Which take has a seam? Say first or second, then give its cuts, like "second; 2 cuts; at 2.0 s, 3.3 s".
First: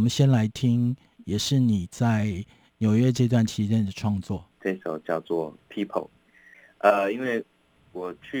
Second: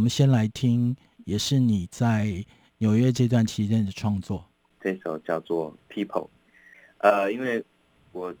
first; 1 cut; at 4.5 s